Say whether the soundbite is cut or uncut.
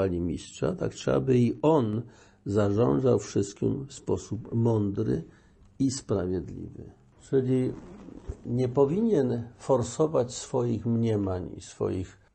uncut